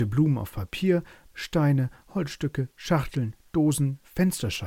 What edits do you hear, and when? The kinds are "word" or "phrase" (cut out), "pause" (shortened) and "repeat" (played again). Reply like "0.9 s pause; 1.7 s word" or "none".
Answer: 1.3 s word